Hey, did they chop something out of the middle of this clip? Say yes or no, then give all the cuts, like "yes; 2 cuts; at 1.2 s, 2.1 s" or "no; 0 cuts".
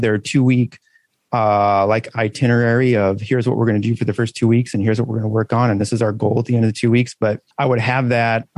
yes; 1 cut; at 7.5 s